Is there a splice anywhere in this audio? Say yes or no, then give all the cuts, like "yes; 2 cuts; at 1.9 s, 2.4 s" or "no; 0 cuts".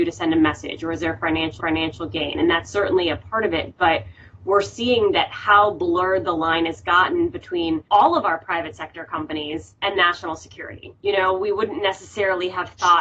yes; 4 cuts; at 1.6 s, 7.9 s, 9.8 s, 11.0 s